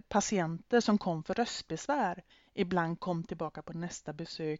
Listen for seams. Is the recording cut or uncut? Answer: cut